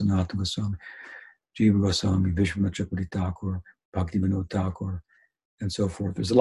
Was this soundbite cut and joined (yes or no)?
no